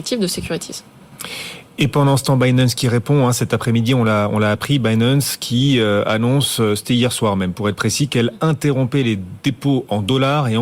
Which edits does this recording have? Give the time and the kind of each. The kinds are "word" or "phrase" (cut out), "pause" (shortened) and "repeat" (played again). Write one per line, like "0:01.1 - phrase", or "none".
none